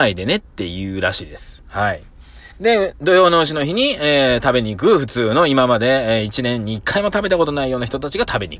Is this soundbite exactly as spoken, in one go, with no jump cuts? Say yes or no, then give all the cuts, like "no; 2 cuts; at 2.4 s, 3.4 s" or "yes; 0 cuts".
no; 1 cut; at 2.5 s